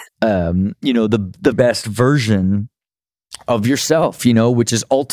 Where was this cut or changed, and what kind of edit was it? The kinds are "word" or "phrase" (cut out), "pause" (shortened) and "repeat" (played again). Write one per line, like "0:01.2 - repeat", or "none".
0:01.5 - word